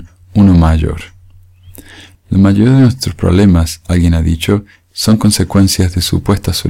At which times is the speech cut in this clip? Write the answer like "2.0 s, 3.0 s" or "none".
none